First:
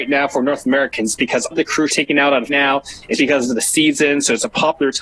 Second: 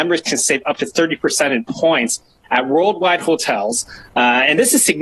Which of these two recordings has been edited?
first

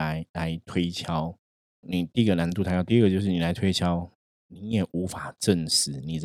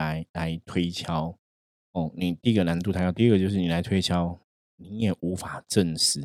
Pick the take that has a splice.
first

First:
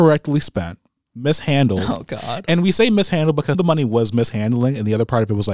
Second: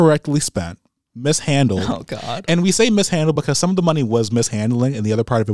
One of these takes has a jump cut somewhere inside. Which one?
first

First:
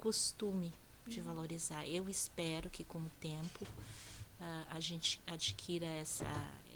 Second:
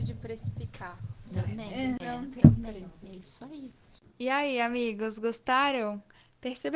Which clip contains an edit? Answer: second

